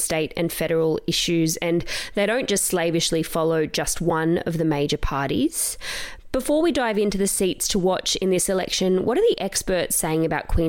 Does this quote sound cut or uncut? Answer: uncut